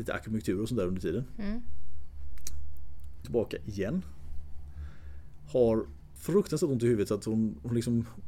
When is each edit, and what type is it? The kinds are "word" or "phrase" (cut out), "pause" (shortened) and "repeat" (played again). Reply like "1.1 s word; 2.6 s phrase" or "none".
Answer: 3.2 s word